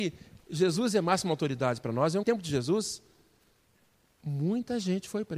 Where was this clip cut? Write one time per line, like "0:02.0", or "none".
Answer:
0:02.2